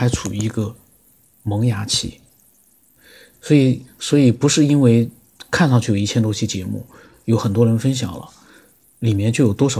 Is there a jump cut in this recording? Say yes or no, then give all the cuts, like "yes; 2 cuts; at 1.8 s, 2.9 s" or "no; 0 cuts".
no; 0 cuts